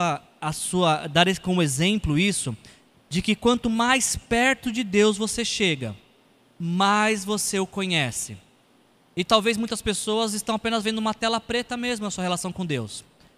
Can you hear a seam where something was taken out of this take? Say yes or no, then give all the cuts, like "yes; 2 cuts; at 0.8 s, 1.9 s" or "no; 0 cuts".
no; 0 cuts